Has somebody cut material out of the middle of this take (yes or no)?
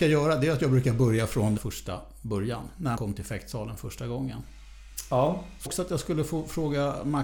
yes